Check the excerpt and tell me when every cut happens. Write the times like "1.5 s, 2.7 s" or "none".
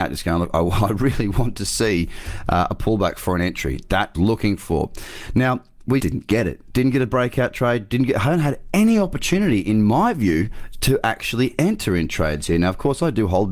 4.1 s, 6.0 s